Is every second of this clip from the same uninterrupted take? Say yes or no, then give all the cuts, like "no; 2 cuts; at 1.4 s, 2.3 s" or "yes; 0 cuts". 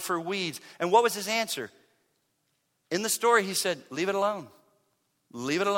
yes; 0 cuts